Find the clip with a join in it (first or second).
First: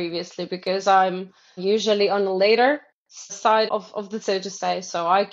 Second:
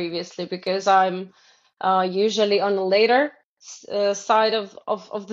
first